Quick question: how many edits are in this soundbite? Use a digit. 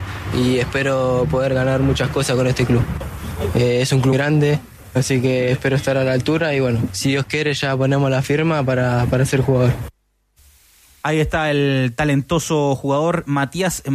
1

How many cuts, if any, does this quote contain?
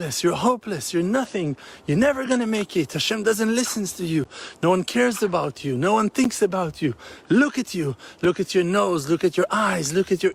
0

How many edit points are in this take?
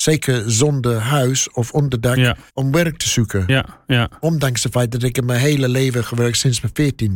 1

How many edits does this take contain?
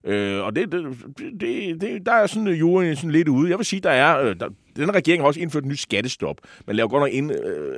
1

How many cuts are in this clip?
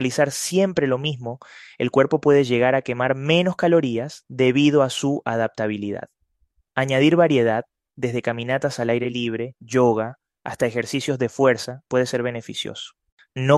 0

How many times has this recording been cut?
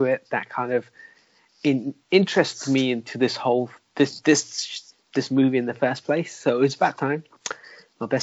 3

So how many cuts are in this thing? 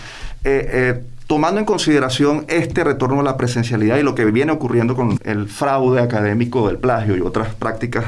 1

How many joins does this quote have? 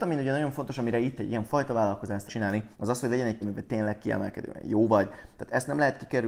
4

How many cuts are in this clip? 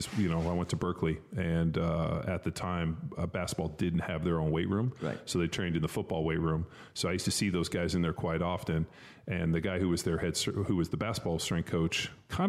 0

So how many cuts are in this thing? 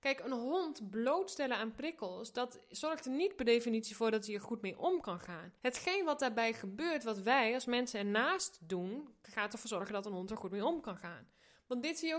1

